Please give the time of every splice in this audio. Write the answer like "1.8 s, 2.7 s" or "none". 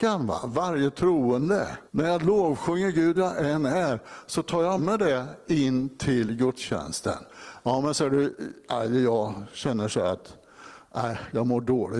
1.9 s, 3.2 s, 4.8 s